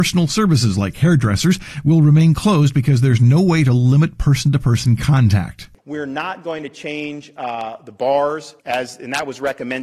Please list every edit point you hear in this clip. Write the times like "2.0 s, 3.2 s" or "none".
5.8 s, 8.6 s

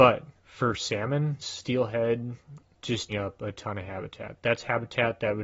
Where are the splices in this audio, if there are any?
1.4 s, 2.7 s, 3.1 s

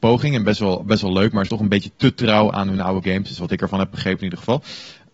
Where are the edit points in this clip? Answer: 1.5 s

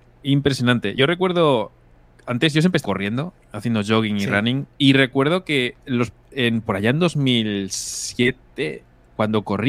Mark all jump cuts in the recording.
2.8 s, 4.7 s

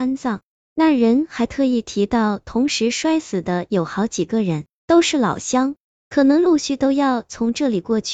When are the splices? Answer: none

